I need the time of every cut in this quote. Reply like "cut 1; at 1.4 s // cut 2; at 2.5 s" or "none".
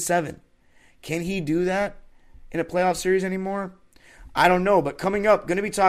none